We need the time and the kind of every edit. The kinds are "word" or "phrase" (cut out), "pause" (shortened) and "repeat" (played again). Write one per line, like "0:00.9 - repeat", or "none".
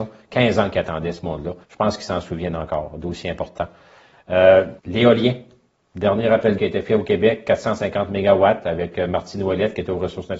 0:01.6 - pause
0:04.8 - pause
0:06.6 - word